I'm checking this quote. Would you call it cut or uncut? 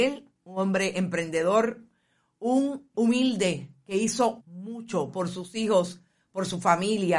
cut